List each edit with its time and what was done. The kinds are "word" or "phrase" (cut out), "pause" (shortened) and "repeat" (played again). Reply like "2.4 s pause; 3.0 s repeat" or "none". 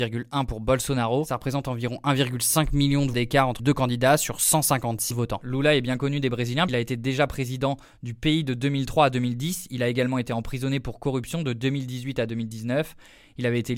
3.1 s word; 3.6 s word; 5.1 s word; 6.7 s word